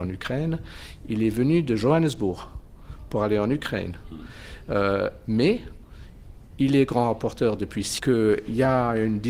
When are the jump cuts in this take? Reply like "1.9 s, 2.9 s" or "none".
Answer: 8.0 s